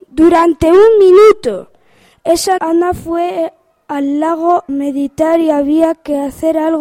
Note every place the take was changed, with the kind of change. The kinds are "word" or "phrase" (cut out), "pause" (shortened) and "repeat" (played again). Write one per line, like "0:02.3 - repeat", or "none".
0:02.6 - word
0:04.7 - word